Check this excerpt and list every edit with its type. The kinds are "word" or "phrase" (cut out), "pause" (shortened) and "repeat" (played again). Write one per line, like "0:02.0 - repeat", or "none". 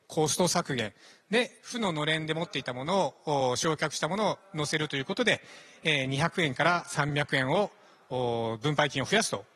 none